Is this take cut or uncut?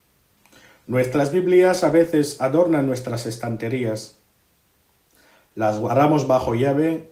uncut